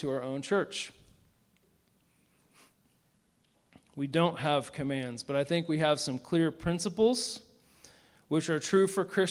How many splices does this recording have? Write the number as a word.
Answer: zero